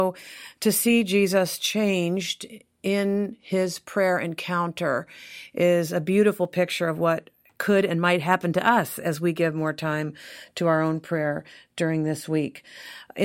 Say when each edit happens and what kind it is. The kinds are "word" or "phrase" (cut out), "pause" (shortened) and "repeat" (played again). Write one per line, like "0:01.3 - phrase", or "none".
none